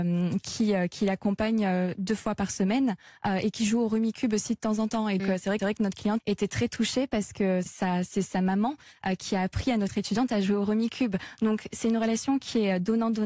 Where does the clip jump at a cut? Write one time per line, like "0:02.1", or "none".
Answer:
0:05.2
0:05.6
0:06.2
0:07.7